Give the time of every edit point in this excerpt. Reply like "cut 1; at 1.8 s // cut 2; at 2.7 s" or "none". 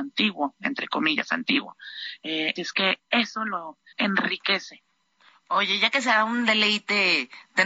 cut 1; at 2.6 s // cut 2; at 3.9 s

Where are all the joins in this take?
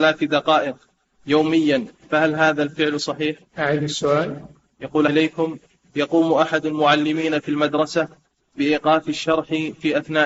cut 1; at 3.5 s // cut 2; at 5.1 s

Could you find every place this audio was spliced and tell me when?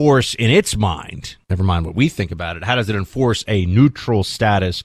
cut 1; at 1.4 s

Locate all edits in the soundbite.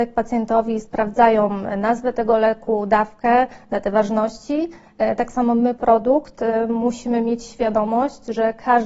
cut 1; at 5.8 s

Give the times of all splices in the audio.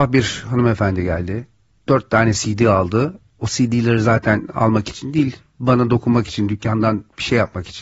none

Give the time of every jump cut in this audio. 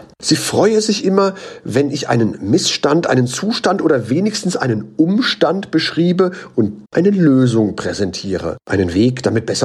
cut 1; at 6.9 s

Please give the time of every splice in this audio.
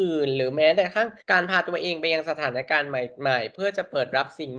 cut 1; at 1.2 s

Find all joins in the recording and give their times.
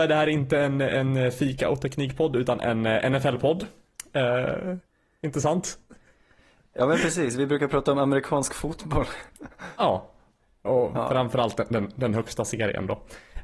none

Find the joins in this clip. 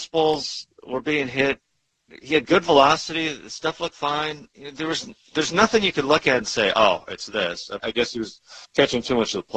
cut 1; at 4.5 s // cut 2; at 7.8 s // cut 3; at 8.6 s

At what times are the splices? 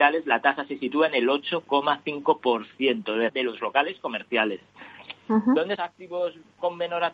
cut 1; at 3.3 s // cut 2; at 5.8 s

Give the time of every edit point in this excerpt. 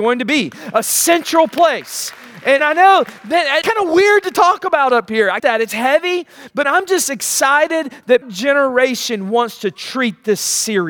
cut 1; at 2.6 s // cut 2; at 3.6 s // cut 3; at 5.4 s // cut 4; at 6.6 s // cut 5; at 8.2 s

